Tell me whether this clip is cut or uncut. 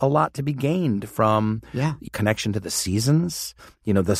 cut